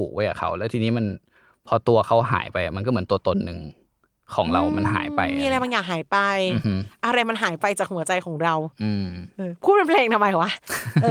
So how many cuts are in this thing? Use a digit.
0